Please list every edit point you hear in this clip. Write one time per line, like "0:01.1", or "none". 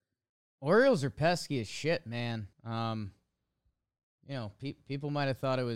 0:02.5

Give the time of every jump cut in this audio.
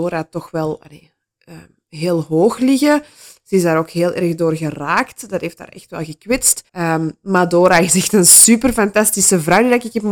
0:06.7

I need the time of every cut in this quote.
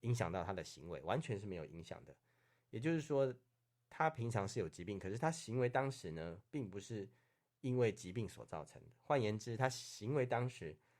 none

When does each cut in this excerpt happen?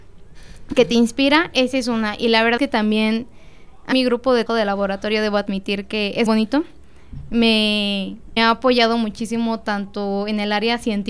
0:02.6
0:03.9
0:04.5
0:06.3
0:08.4

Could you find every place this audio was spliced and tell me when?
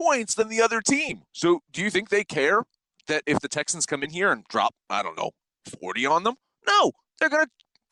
0:01.3
0:03.2

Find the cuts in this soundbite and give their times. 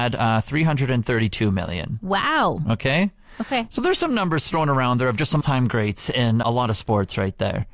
0:05.4
0:06.4

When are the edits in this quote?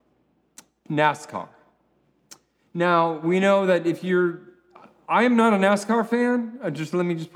none

